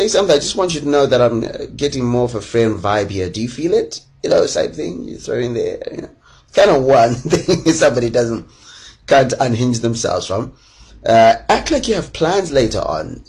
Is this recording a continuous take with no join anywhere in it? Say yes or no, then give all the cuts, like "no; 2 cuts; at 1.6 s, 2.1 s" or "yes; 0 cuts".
yes; 0 cuts